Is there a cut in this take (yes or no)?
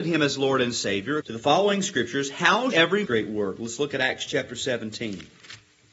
yes